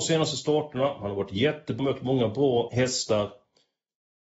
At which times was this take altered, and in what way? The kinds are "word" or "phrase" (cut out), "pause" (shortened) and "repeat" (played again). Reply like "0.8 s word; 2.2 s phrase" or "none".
1.8 s word; 2.7 s word